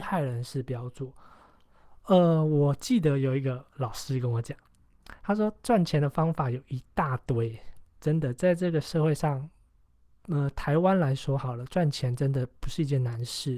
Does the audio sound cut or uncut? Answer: uncut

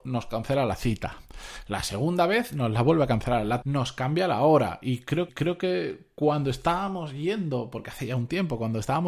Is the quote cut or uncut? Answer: cut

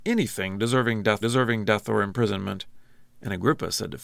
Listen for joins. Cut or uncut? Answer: cut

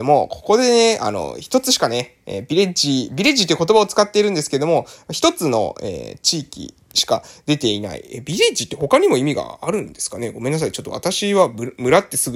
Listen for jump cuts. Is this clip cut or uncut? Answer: uncut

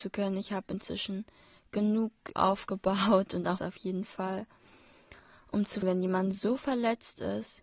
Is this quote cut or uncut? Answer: cut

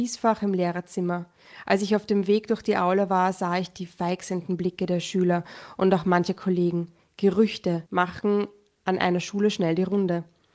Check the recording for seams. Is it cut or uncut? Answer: cut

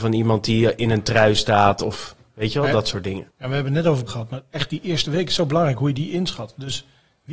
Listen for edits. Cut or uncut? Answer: cut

